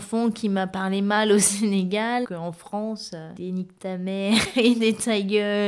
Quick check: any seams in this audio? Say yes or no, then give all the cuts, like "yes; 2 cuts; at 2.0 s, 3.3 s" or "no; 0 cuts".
yes; 1 cut; at 2.2 s